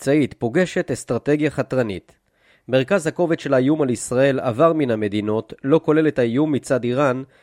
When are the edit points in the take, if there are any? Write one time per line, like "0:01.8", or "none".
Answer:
none